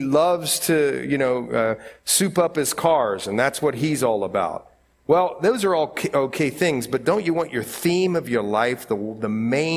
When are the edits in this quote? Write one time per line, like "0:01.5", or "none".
none